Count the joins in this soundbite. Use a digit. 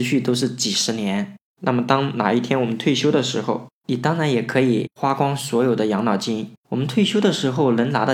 1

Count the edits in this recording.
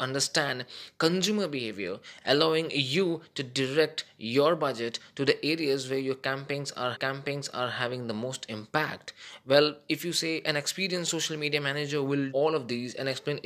2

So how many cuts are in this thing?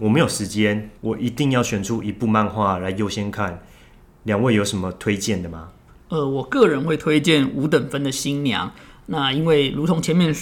1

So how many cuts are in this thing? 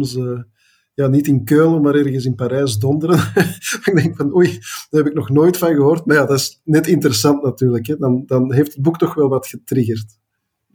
0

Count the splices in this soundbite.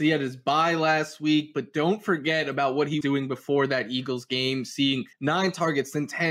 2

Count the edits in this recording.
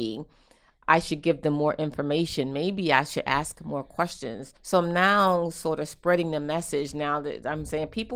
1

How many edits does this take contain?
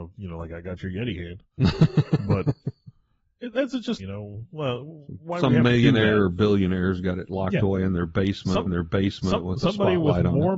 2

